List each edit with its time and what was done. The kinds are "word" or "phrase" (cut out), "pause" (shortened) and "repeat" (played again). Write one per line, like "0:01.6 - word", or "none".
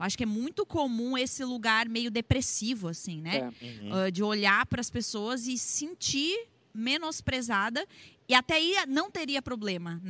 none